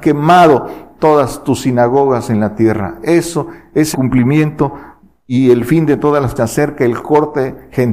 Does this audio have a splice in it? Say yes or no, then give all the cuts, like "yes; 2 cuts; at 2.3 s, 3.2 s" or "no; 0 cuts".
yes; 2 cuts; at 3.9 s, 6.4 s